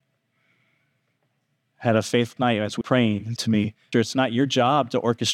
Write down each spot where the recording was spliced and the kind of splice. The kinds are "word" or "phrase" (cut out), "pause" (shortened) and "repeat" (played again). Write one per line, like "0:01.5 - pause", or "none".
0:02.4 - phrase
0:02.8 - word
0:03.4 - word
0:03.9 - word